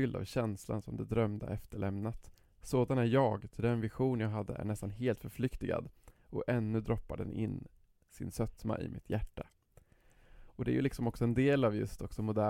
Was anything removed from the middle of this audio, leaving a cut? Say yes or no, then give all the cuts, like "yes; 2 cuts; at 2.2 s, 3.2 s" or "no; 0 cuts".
no; 0 cuts